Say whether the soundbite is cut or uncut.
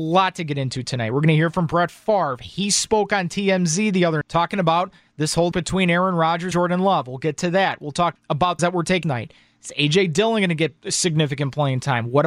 cut